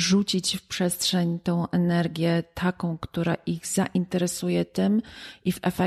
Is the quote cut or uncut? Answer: uncut